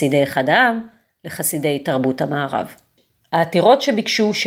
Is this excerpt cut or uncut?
uncut